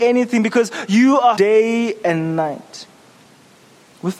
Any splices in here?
yes; 1 cut; at 1.4 s

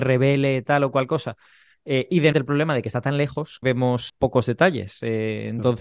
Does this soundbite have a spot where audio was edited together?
yes; 3 cuts; at 2.3 s, 3.6 s, 4.1 s

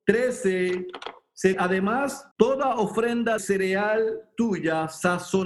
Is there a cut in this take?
yes; 3 cuts; at 1.5 s, 2.3 s, 3.4 s

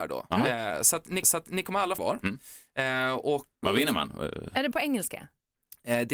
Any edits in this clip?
yes; 4 cuts; at 1.2 s, 2.0 s, 3.6 s, 4.7 s

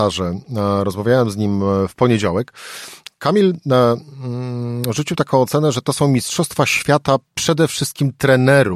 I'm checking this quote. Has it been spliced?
no; 0 cuts

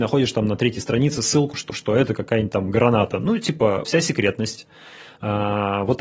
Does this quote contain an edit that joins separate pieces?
yes; 2 cuts; at 1.7 s, 3.8 s

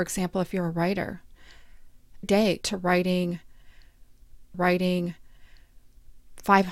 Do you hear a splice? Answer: yes; 3 cuts; at 2.2 s, 2.6 s, 4.5 s

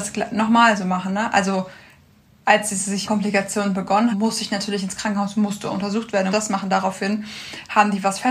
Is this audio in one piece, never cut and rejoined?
no; 3 cuts; at 3.1 s, 4.1 s, 6.3 s

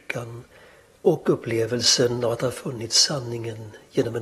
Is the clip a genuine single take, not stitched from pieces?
yes; 0 cuts

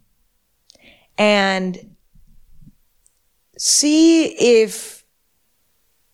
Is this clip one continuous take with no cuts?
yes; 0 cuts

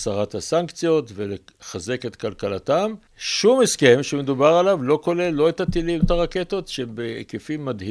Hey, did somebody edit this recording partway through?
yes; 2 cuts; at 3.1 s, 6.0 s

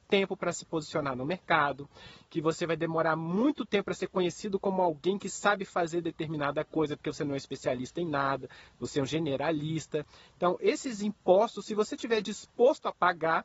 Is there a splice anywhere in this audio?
no; 0 cuts

